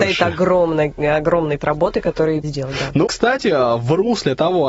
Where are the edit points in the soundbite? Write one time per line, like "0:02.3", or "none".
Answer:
0:01.6
0:02.4
0:03.1